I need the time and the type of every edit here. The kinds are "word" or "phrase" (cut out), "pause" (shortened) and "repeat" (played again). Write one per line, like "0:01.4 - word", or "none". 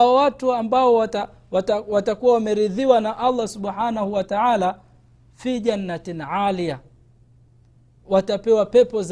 none